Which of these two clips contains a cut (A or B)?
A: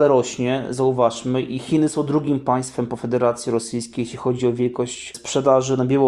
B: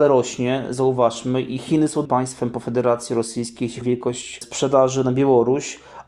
B